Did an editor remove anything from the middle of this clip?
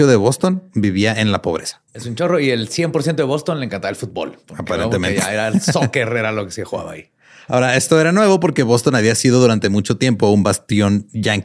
yes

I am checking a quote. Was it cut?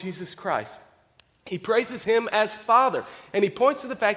no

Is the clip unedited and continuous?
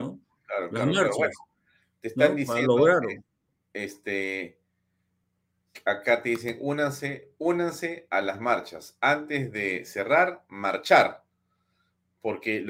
yes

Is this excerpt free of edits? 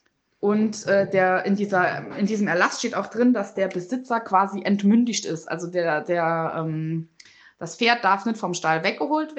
yes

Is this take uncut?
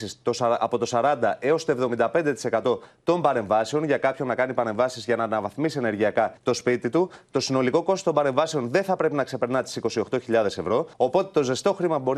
no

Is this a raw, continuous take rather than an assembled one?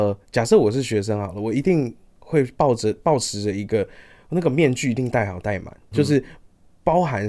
no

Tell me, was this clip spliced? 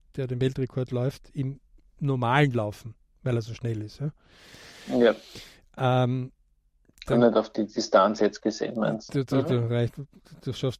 no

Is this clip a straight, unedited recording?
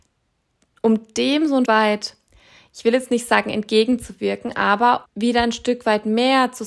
no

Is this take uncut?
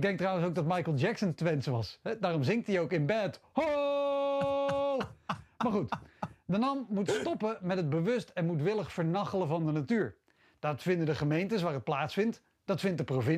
yes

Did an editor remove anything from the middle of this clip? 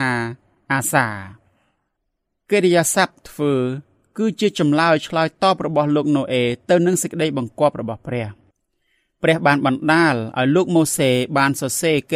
no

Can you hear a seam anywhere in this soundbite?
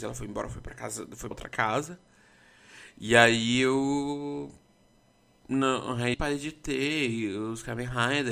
yes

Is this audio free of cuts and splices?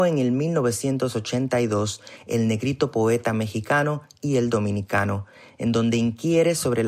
yes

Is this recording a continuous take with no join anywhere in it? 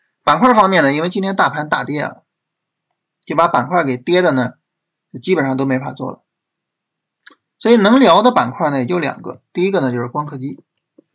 yes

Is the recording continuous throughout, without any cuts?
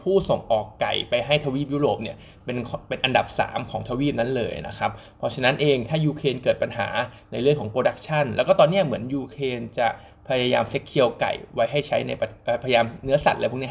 yes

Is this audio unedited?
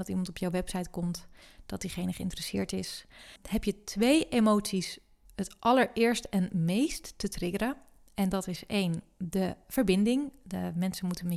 yes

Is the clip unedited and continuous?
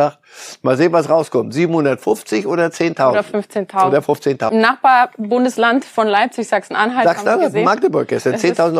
no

